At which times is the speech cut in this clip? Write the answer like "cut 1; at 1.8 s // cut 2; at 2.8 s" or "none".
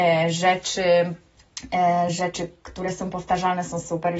none